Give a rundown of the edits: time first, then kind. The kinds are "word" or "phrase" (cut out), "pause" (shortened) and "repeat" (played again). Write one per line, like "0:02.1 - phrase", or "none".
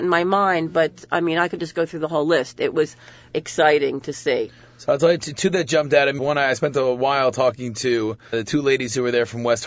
0:03.3 - word
0:06.2 - word
0:08.3 - word